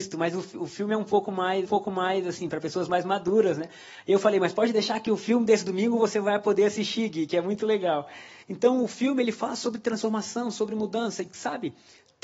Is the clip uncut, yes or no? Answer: no